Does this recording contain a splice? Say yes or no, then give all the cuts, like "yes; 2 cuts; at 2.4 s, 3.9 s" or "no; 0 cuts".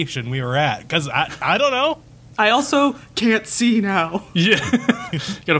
no; 0 cuts